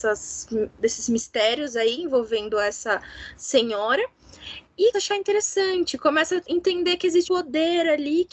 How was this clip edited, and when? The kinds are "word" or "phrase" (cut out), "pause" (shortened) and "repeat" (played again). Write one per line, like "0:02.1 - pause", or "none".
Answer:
0:04.9 - word
0:07.2 - word